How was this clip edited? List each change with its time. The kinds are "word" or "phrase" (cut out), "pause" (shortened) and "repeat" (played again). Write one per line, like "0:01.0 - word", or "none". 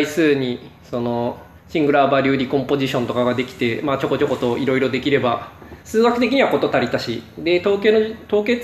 0:01.6 - pause
0:05.8 - pause